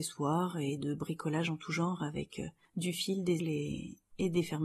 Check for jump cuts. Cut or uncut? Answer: cut